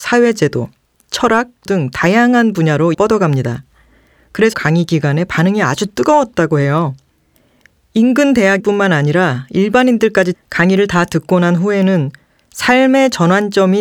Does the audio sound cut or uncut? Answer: cut